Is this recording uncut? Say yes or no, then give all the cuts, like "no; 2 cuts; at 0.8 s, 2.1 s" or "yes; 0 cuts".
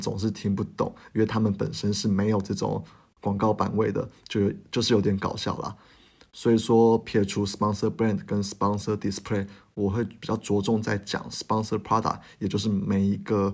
yes; 0 cuts